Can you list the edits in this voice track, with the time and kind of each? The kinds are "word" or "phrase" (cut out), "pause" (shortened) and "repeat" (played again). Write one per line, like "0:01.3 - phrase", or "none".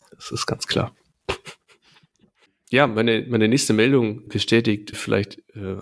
none

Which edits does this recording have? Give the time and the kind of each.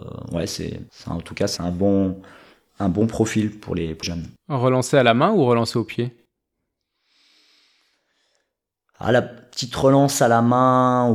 0:01.6 - word
0:04.0 - word

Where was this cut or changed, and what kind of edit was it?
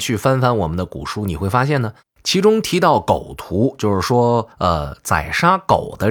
0:04.5 - pause

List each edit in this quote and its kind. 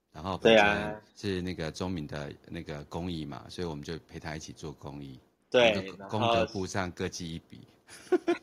0:01.1 - pause
0:05.4 - pause

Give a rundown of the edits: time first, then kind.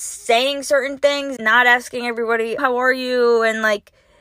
0:01.4 - word
0:02.6 - word

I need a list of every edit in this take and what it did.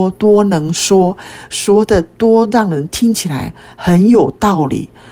none

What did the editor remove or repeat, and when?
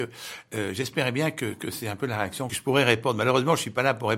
0:02.5 - phrase

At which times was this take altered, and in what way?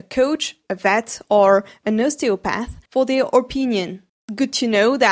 0:02.9 - pause
0:04.1 - pause

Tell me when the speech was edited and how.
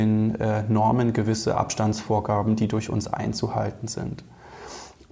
none

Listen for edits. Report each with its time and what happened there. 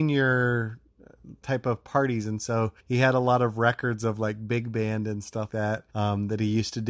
0:02.8 - pause
0:05.5 - word
0:05.9 - pause

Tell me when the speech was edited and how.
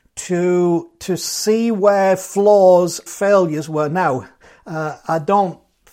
0:03.1 - word

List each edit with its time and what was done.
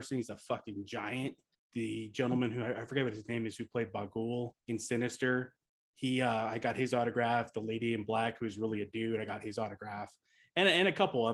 0:01.6 - pause
0:04.6 - pause
0:05.6 - pause

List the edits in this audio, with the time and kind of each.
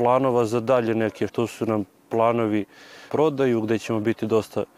0:01.3 - word
0:03.1 - phrase

